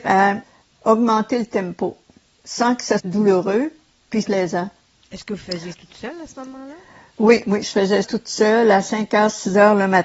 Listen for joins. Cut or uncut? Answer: cut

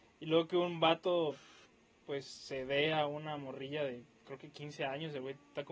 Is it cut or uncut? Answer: uncut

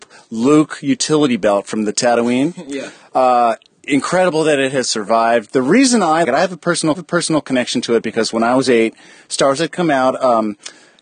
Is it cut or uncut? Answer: cut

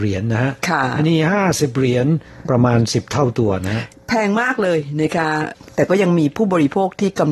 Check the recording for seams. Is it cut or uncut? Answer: uncut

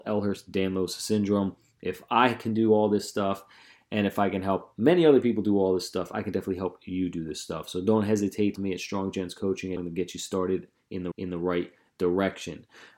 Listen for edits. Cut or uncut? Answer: cut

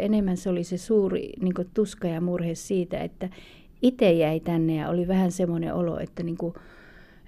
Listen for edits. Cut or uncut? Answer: uncut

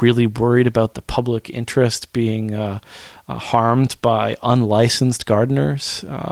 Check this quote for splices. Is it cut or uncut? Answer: uncut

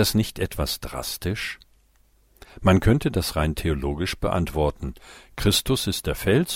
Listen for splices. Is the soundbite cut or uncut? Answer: uncut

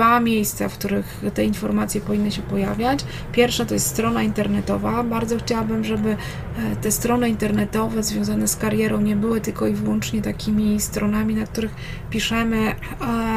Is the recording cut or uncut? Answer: uncut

